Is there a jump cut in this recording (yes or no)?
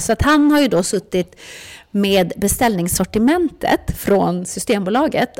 no